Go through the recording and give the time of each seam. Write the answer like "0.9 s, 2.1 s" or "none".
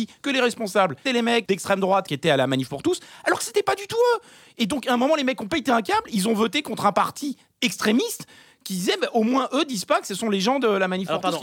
1.1 s, 1.5 s